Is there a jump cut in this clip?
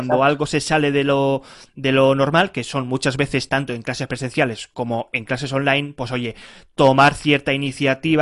no; 0 cuts

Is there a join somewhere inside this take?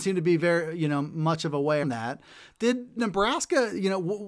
yes; 2 cuts; at 1.8 s, 3.0 s

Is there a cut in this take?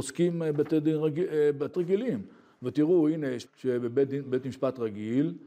yes; 2 cuts; at 1.7 s, 3.5 s

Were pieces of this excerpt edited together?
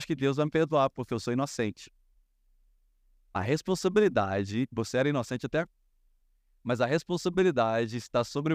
no; 0 cuts

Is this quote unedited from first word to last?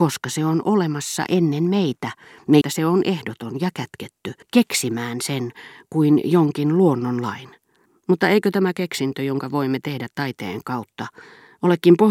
no; 3 cuts; at 2.6 s, 4.4 s, 7.9 s

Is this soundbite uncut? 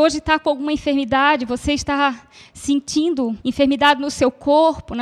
no; 1 cut; at 3.4 s

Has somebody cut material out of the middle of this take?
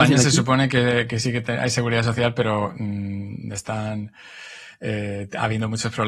no; 0 cuts

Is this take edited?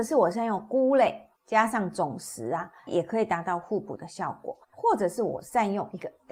yes; 3 cuts; at 1.3 s, 2.9 s, 4.6 s

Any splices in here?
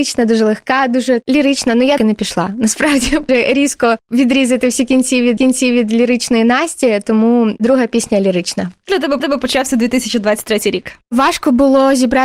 yes; 5 cuts; at 2.0 s, 3.3 s, 5.4 s, 8.9 s, 9.2 s

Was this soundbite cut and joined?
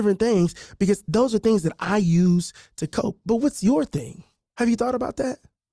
no; 0 cuts

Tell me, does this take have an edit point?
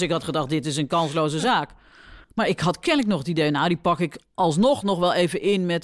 yes; 1 cut; at 2.2 s

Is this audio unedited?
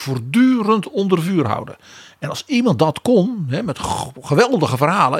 yes; 0 cuts

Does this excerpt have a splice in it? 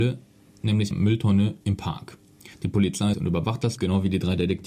yes; 5 cuts; at 0.9 s, 1.6 s, 2.5 s, 3.1 s, 3.8 s

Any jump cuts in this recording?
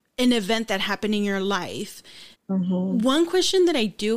yes; 1 cut; at 2.3 s

